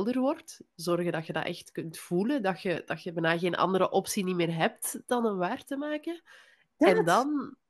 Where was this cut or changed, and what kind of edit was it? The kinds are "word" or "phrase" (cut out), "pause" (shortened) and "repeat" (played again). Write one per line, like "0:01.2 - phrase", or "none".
none